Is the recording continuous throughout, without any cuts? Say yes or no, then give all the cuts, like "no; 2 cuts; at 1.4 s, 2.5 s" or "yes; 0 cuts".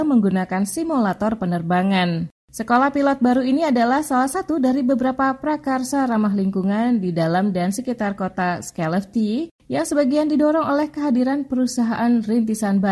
yes; 0 cuts